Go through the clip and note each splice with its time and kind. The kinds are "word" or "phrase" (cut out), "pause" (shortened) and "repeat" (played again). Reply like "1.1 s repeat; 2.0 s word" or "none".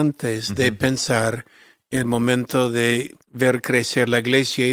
2.0 s word; 3.2 s pause